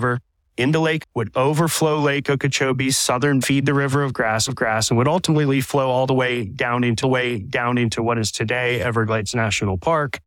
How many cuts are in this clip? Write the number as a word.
four